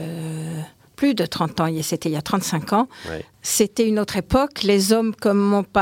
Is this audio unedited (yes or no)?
yes